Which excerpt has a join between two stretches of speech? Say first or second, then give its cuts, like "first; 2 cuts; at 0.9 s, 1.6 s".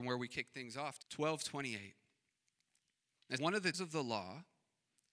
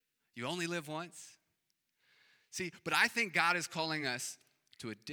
first; 3 cuts; at 1.0 s, 3.4 s, 3.7 s